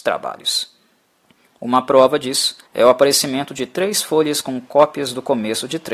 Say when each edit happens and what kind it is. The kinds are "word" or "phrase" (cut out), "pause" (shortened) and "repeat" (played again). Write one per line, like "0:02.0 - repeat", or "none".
0:01.1 - pause
0:02.7 - pause